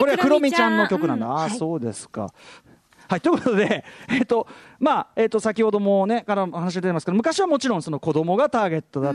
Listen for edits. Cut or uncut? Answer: uncut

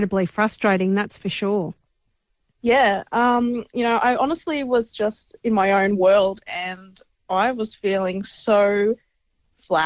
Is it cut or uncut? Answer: uncut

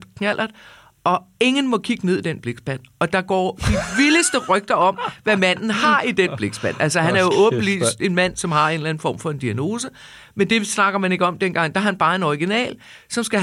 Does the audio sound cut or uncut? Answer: uncut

